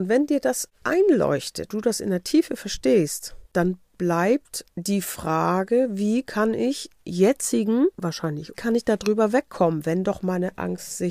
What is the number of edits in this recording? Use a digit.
5